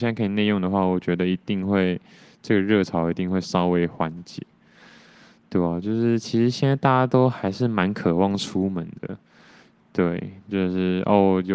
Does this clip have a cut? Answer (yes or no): no